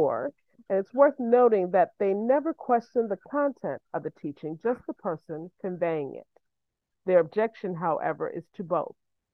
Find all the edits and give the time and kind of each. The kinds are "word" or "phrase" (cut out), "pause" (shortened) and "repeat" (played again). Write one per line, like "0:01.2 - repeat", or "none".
0:03.9 - pause